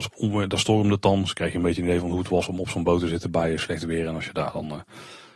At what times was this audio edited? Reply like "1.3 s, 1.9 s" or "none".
none